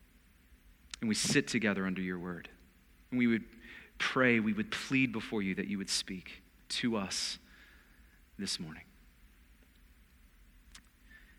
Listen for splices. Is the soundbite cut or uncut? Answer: uncut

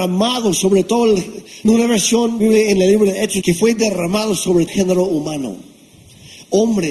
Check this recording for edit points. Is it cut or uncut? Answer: cut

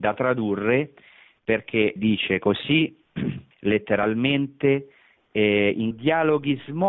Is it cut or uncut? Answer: cut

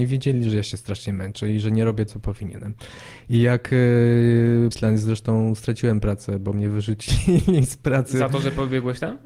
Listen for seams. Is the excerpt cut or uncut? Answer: cut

